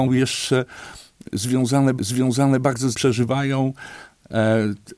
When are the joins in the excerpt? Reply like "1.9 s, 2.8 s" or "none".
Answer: 2.0 s, 2.9 s